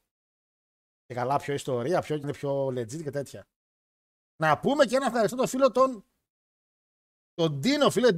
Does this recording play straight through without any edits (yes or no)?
no